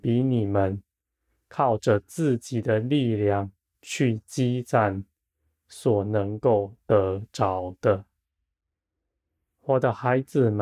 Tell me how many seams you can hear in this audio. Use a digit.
1